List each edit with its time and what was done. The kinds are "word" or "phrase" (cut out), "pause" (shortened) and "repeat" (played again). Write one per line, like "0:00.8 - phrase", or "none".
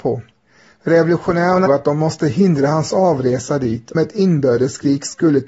0:01.7 - word
0:03.9 - word